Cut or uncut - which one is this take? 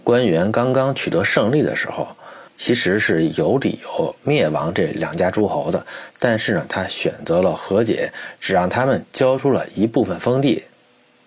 cut